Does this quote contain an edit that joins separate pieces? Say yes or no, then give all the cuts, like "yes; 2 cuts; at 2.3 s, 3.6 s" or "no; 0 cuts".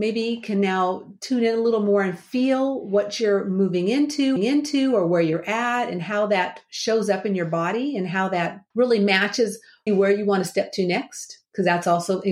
yes; 3 cuts; at 4.4 s, 8.7 s, 9.9 s